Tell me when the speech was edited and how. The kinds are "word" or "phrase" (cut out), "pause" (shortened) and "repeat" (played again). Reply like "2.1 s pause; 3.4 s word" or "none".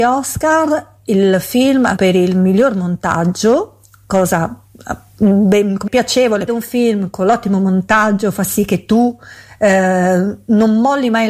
2.0 s word; 5.9 s word; 6.5 s phrase